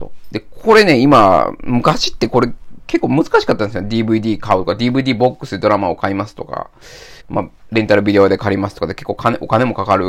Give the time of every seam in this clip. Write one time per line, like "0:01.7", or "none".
0:07.2